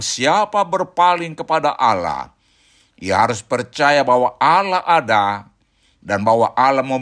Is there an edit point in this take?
no; 0 cuts

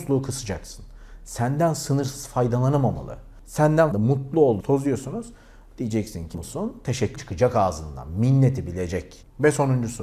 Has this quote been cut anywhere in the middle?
yes; 4 cuts; at 3.9 s, 4.6 s, 6.3 s, 7.2 s

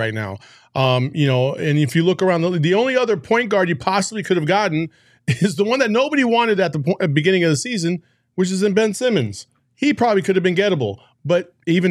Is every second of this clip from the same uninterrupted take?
yes; 0 cuts

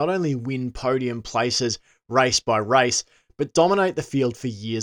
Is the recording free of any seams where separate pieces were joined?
yes; 0 cuts

